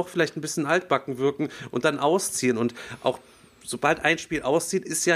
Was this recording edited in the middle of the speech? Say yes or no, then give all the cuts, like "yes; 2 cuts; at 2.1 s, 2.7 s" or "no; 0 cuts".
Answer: no; 0 cuts